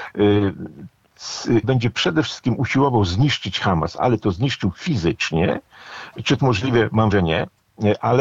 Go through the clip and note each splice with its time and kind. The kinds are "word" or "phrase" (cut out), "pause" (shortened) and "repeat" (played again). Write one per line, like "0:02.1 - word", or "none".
0:01.6 - word
0:06.4 - word
0:07.1 - word